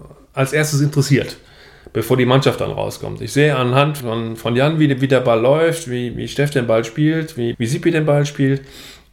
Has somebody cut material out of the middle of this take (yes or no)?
yes